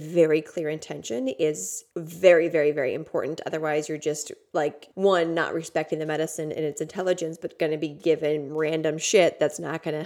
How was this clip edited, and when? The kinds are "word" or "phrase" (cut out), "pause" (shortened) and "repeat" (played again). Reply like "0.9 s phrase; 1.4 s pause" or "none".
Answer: 1.9 s pause; 4.9 s pause